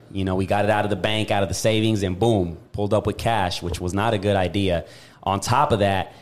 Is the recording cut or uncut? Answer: uncut